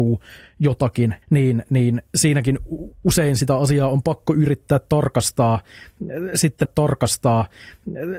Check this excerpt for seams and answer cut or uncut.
cut